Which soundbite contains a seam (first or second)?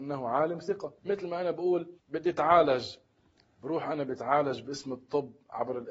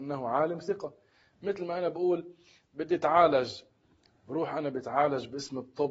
first